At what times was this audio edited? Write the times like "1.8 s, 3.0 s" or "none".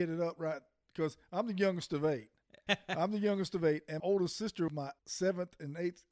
2.7 s, 4.0 s, 4.7 s, 5.0 s